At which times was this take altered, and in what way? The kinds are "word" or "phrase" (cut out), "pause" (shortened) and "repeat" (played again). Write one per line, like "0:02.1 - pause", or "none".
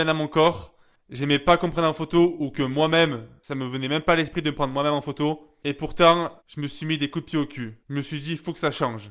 0:06.4 - pause
0:07.8 - pause